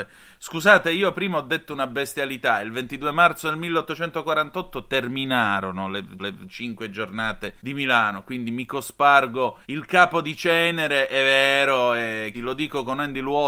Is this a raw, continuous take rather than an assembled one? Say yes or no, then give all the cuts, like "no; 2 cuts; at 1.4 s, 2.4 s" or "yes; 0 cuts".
no; 4 cuts; at 6.2 s, 7.6 s, 9.6 s, 12.3 s